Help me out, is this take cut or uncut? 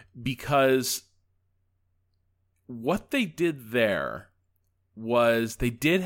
uncut